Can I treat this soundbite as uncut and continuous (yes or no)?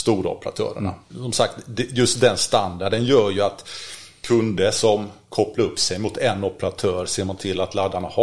no